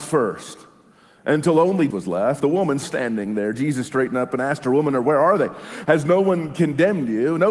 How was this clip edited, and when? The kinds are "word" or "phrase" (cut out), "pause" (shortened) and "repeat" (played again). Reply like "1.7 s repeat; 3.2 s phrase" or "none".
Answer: 1.9 s word; 2.4 s word; 2.8 s word